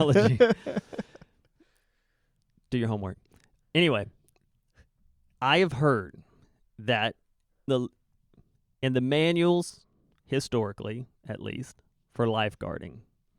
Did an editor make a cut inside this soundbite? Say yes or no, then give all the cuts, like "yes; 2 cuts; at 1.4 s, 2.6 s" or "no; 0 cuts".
yes; 1 cut; at 7.7 s